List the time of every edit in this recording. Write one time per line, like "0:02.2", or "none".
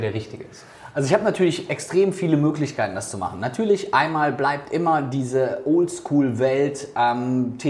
none